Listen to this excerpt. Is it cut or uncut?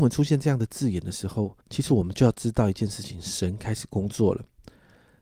cut